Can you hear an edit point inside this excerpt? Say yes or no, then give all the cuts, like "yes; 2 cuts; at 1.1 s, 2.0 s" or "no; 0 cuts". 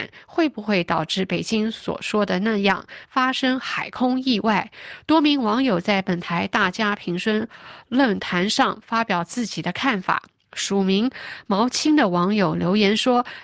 no; 0 cuts